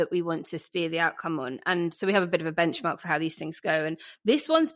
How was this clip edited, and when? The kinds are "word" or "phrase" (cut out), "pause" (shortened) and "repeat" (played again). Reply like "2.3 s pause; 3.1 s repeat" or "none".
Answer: 1.9 s word